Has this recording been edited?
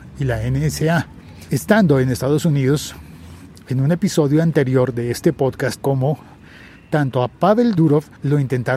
yes; 1 cut; at 5.8 s

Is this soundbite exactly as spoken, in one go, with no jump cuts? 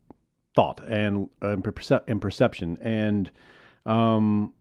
yes; 0 cuts

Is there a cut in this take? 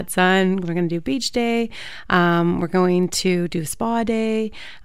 no; 0 cuts

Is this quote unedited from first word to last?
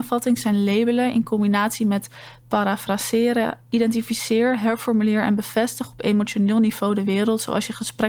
yes; 0 cuts

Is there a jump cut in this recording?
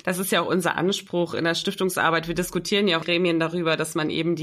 yes; 1 cut; at 3.0 s

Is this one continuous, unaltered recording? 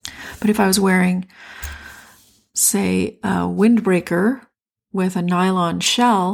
yes; 0 cuts

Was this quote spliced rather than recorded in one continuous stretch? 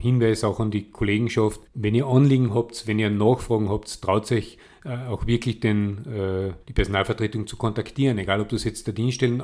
yes; 2 cuts; at 1.6 s, 6.6 s

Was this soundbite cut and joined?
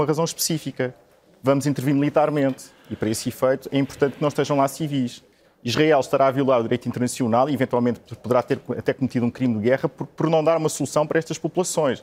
no; 0 cuts

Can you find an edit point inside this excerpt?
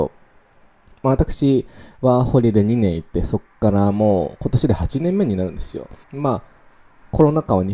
yes; 1 cut; at 6.0 s

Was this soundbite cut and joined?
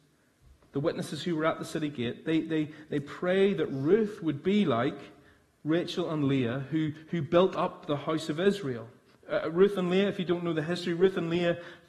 no; 0 cuts

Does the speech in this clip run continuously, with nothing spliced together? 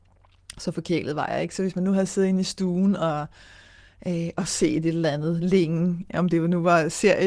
yes; 0 cuts

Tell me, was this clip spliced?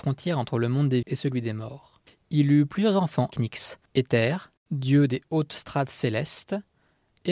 yes; 4 cuts; at 1.0 s, 2.1 s, 3.3 s, 3.9 s

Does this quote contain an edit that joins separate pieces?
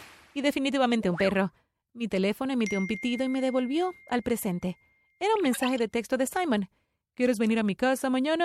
no; 0 cuts

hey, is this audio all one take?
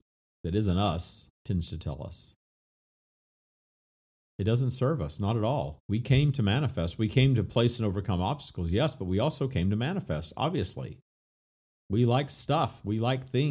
no; 2 cuts; at 1.3 s, 5.8 s

